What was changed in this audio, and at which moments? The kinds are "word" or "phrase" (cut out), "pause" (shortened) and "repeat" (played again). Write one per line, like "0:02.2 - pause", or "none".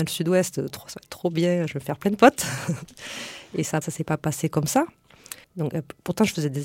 0:03.8 - word
0:05.4 - pause